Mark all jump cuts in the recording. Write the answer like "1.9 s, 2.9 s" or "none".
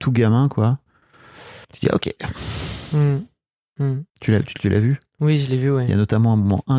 1.6 s, 4.1 s